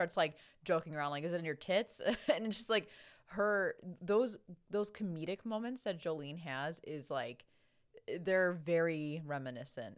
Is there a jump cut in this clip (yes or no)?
no